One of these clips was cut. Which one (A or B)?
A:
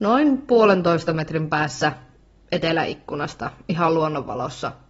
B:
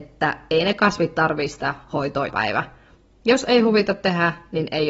B